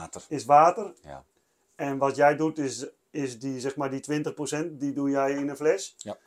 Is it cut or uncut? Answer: uncut